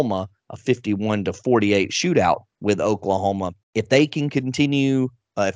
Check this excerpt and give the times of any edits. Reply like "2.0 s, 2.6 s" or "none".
2.5 s, 3.6 s